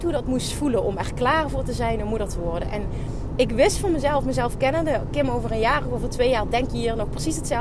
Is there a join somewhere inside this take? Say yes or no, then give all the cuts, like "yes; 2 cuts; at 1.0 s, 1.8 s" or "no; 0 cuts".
no; 0 cuts